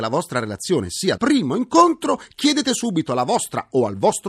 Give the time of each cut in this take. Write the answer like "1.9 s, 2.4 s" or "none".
1.2 s